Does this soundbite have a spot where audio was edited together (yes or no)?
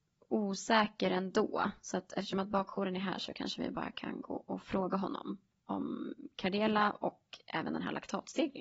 no